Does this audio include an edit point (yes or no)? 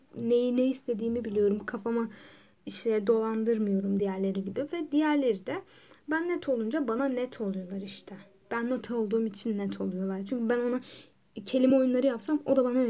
no